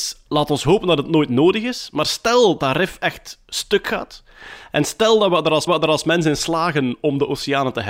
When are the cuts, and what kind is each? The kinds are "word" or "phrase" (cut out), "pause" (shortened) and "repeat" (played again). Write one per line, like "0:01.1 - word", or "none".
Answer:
0:02.6 - word
0:05.7 - repeat